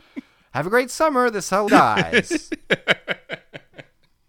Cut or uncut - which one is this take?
cut